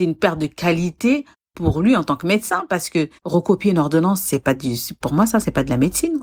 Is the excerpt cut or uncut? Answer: cut